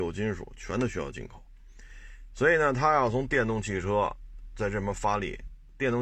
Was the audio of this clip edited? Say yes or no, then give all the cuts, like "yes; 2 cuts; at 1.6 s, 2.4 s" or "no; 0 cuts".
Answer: no; 0 cuts